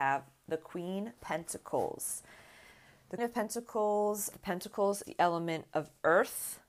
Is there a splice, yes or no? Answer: yes